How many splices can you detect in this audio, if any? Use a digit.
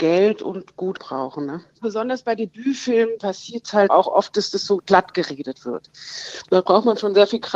3